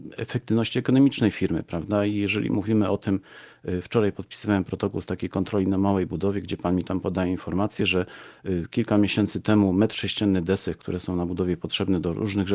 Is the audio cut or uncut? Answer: uncut